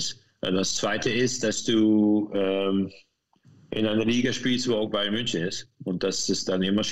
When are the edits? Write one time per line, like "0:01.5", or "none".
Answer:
none

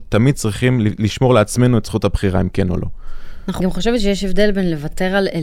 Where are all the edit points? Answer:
0:03.6

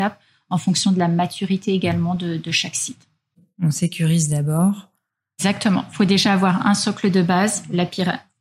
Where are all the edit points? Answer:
none

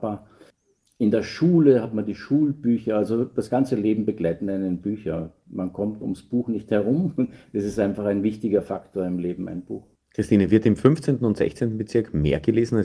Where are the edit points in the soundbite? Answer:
0:10.0

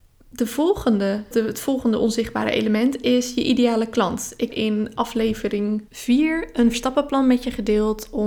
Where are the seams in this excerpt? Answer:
0:01.3
0:04.5
0:05.9
0:06.7

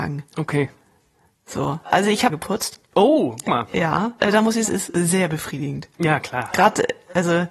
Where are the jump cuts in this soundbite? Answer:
0:02.3
0:03.4
0:04.2
0:04.7
0:05.9

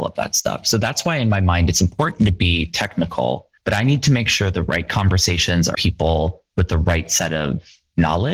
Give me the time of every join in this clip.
0:03.6
0:05.7

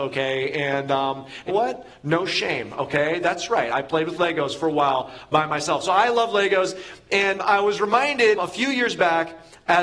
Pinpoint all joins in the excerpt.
0:01.5
0:07.4
0:08.4

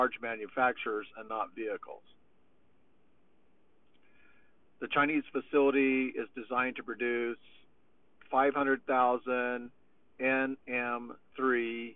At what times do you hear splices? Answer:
none

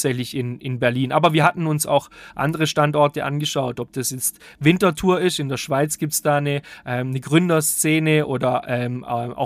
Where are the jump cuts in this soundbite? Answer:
none

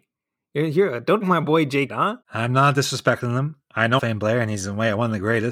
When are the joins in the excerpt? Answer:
0:01.2
0:01.9
0:04.0

